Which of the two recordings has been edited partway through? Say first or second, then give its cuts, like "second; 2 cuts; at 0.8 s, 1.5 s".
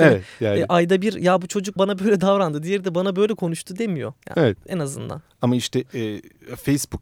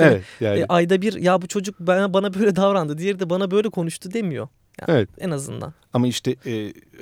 first; 2 cuts; at 1.8 s, 4.2 s